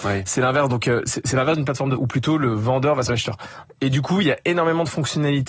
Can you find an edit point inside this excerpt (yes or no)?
yes